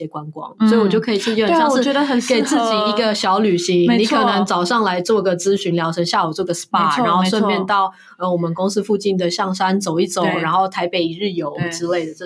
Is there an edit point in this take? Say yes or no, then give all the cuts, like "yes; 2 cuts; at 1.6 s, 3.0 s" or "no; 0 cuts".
no; 0 cuts